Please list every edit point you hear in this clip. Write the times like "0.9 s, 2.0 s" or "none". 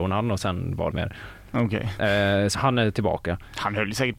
0.9 s, 2.5 s